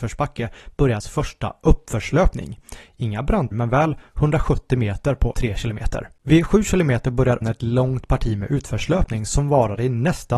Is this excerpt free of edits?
no; 4 cuts; at 1.0 s, 3.5 s, 5.3 s, 7.4 s

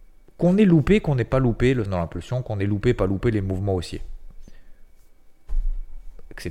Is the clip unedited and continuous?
no; 1 cut; at 1.9 s

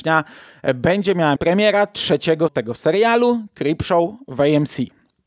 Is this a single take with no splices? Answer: no; 2 cuts; at 1.4 s, 2.5 s

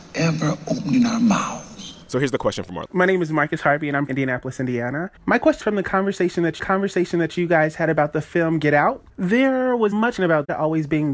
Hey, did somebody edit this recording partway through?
yes; 8 cuts; at 2.0 s, 2.9 s, 4.1 s, 5.2 s, 5.6 s, 6.6 s, 9.1 s, 10.2 s

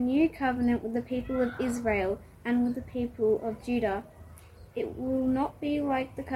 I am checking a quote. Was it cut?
yes; 1 cut; at 4.7 s

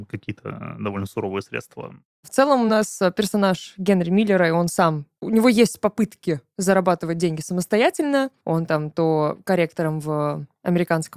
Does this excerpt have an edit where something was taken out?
no; 0 cuts

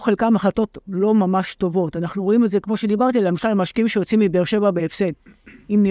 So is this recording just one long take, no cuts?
yes; 0 cuts

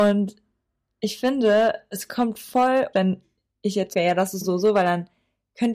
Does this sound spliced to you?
yes; 3 cuts; at 2.9 s, 3.9 s, 4.4 s

